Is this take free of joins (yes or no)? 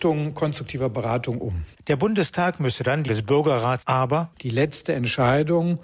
no